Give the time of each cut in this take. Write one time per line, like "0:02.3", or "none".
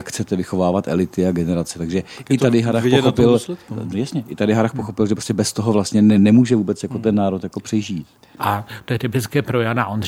0:03.7